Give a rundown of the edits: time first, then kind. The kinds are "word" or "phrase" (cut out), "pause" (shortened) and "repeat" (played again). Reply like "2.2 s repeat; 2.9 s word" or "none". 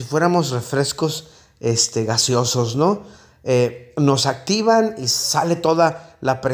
none